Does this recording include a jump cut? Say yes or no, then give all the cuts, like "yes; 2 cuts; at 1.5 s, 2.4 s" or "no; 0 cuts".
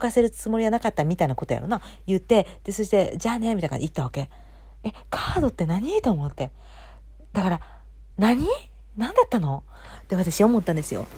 yes; 1 cut; at 8.1 s